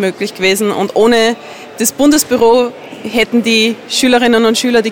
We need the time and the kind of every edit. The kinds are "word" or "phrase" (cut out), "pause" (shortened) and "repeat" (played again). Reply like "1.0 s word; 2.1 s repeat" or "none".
none